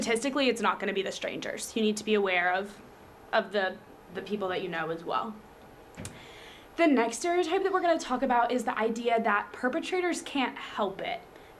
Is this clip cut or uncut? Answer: uncut